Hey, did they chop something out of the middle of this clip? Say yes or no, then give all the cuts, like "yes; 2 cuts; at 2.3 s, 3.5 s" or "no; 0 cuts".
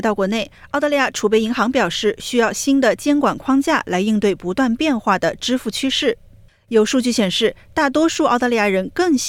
yes; 1 cut; at 6.5 s